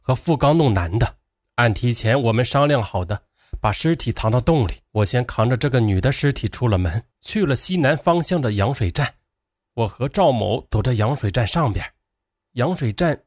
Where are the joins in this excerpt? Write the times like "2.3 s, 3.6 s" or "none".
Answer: 1.3 s, 4.9 s, 7.1 s, 9.5 s